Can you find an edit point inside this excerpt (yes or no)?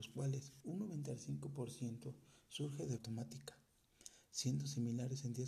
yes